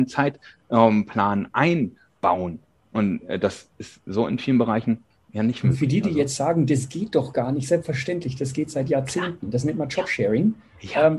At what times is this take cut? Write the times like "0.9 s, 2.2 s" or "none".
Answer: none

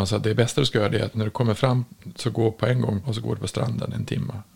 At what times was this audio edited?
1.1 s, 3.0 s

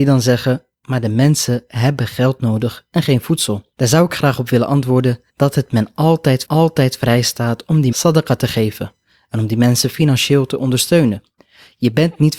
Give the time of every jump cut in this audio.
3.7 s, 5.3 s, 6.4 s, 7.9 s

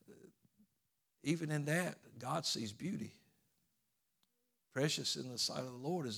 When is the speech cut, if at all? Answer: none

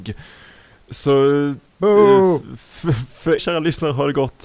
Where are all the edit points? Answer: 3.4 s

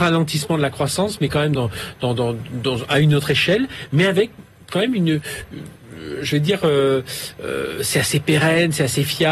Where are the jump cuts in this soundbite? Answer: none

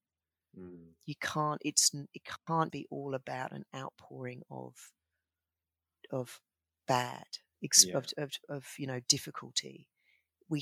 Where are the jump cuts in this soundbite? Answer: 2.7 s

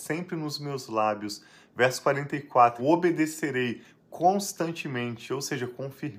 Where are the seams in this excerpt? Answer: 2.8 s

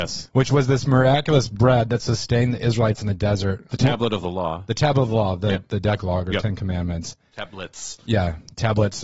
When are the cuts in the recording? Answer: none

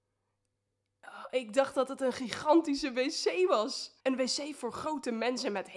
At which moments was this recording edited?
4.0 s

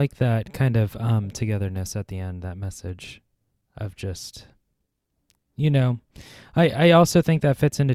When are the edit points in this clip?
none

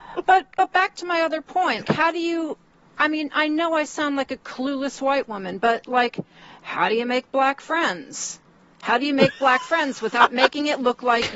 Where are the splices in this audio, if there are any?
1.8 s

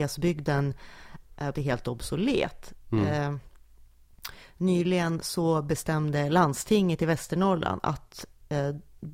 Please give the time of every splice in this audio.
1.5 s

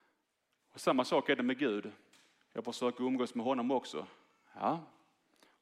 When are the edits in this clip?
none

